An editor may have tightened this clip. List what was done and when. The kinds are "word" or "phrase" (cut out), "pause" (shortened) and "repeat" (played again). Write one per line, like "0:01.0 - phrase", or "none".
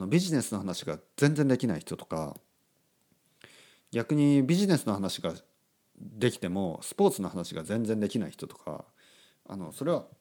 none